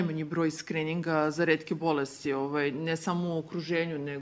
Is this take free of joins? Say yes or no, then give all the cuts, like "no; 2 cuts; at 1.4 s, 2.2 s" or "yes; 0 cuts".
yes; 0 cuts